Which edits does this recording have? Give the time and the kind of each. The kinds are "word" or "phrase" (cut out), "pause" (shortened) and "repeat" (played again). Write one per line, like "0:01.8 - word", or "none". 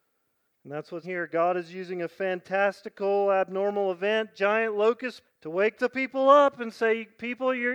0:01.0 - word
0:05.2 - word